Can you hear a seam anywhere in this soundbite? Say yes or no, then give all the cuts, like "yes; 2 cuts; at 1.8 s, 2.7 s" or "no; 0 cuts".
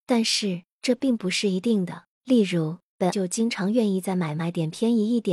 yes; 1 cut; at 3.1 s